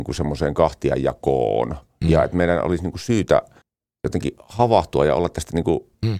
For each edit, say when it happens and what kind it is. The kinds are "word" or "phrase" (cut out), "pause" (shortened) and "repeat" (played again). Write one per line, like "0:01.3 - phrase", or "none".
0:03.6 - pause